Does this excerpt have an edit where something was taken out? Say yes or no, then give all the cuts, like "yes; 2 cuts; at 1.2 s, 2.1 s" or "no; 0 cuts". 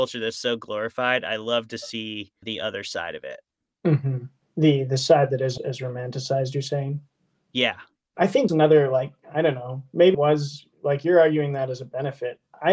yes; 4 cuts; at 2.4 s, 5.6 s, 8.5 s, 10.1 s